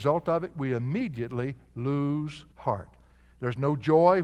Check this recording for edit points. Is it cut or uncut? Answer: cut